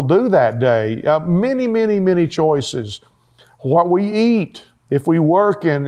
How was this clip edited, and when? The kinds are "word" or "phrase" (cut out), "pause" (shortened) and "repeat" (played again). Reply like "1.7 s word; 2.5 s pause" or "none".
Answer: none